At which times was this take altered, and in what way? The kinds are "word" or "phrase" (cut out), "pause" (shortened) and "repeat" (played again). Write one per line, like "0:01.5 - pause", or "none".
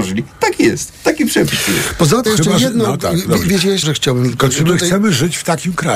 0:02.3 - word
0:03.8 - word

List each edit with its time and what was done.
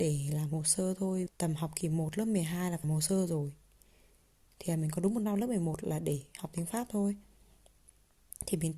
0:01.3 - word
0:02.8 - word

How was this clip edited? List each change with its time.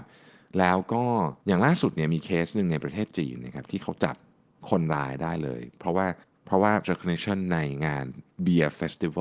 0:01.4 - pause
0:06.2 - pause
0:06.8 - word
0:08.3 - pause

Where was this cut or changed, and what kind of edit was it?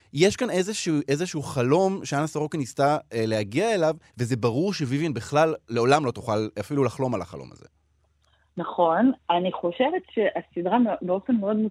none

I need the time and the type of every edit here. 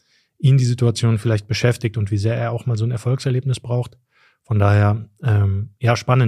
none

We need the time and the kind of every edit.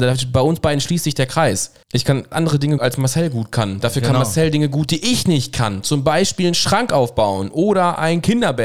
0:01.8 - pause
0:02.3 - word
0:02.8 - word

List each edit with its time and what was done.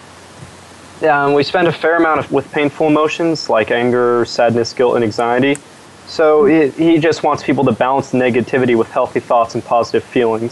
0:02.3 - phrase

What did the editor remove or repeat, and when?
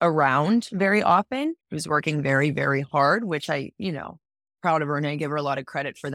0:01.6 - pause

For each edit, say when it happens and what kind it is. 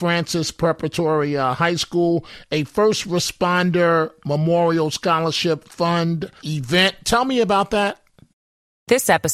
0:06.4 - pause

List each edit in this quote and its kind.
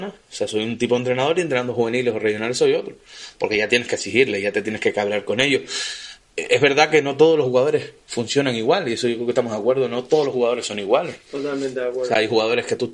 0:06.2 - pause
0:11.2 - pause

